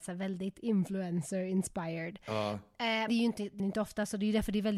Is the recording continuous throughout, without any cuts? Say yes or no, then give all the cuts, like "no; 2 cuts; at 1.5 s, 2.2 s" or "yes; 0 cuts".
no; 2 cuts; at 3.1 s, 3.6 s